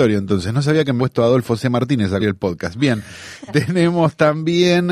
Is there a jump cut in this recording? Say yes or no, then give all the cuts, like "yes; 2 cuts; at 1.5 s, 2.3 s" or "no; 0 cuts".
yes; 3 cuts; at 1.0 s, 2.2 s, 3.5 s